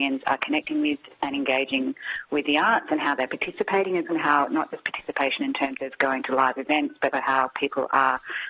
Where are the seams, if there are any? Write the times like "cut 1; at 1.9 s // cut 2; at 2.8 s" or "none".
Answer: cut 1; at 4.1 s // cut 2; at 7.1 s